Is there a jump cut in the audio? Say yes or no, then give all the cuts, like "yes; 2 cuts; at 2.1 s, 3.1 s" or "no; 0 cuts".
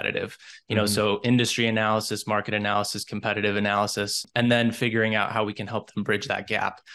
no; 0 cuts